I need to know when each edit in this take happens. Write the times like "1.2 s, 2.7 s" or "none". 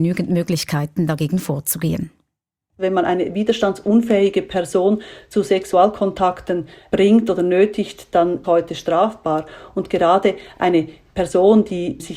8.4 s

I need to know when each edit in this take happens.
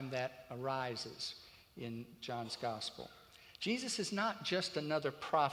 none

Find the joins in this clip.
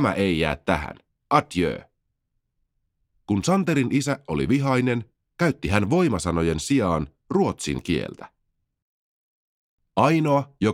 none

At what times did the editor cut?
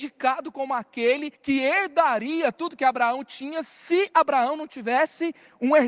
1.3 s

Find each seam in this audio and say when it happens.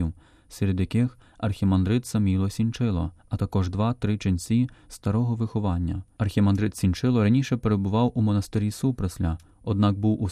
3.2 s

